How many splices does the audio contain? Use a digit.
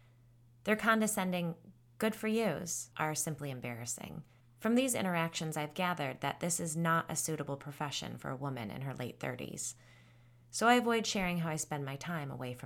2